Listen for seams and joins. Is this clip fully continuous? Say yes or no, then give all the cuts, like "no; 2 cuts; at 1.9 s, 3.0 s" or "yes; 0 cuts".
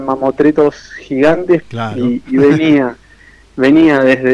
yes; 0 cuts